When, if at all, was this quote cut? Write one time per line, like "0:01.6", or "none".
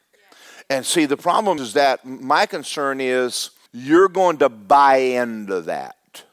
0:01.6
0:03.7